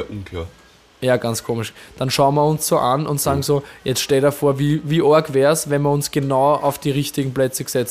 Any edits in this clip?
no; 0 cuts

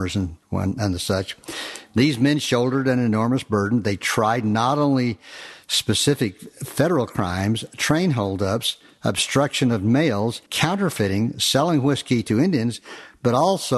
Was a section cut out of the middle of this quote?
yes; 1 cut; at 10.5 s

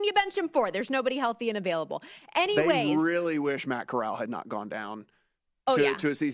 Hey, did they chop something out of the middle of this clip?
no; 0 cuts

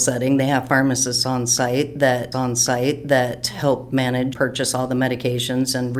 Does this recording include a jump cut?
yes; 2 cuts; at 2.3 s, 4.3 s

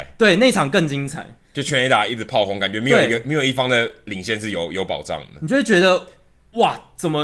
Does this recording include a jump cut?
no; 0 cuts

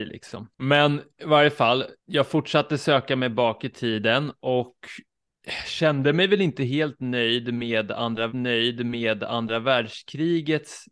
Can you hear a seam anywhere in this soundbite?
yes; 2 cuts; at 2.0 s, 8.3 s

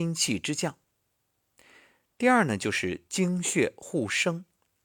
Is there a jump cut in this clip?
no; 0 cuts

